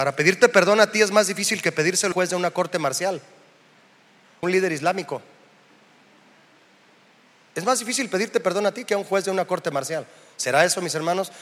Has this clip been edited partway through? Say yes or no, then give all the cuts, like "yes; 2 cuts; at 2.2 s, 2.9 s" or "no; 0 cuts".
yes; 2 cuts; at 2.1 s, 4.4 s